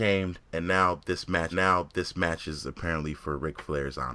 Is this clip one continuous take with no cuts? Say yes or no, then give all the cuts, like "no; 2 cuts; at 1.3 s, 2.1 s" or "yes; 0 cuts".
no; 1 cut; at 1.5 s